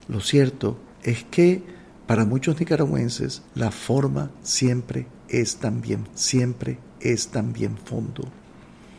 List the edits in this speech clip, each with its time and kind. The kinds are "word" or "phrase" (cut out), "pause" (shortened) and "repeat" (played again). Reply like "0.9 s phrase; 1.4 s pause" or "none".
0.9 s pause; 3.5 s pause; 6.1 s repeat